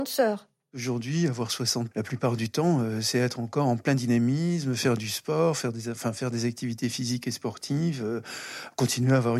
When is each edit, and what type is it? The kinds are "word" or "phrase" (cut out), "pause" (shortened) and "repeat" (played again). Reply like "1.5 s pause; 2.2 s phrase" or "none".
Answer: 1.9 s word